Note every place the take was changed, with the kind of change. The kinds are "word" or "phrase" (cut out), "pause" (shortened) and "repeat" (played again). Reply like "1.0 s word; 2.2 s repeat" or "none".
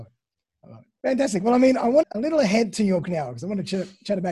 1.0 s pause; 2.0 s phrase; 3.0 s word